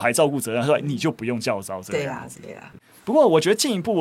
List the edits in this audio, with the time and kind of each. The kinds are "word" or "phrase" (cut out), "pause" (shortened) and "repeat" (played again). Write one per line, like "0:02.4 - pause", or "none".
0:02.7 - phrase

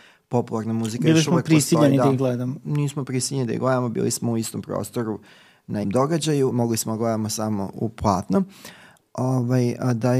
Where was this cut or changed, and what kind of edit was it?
0:05.8 - word
0:06.5 - word
0:07.7 - word

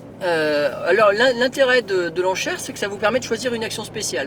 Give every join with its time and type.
none

